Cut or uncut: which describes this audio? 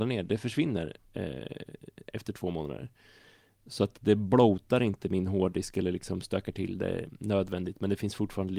uncut